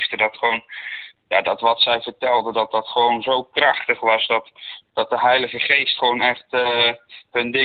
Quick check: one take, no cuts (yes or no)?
yes